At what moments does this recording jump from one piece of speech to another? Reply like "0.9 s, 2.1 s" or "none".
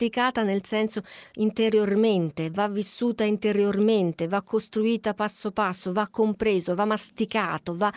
none